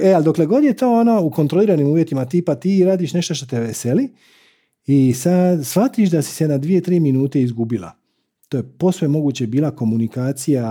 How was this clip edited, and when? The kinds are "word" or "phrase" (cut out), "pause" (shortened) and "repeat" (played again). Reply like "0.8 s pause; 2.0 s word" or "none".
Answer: none